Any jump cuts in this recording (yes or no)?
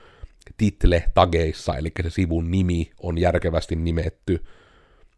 no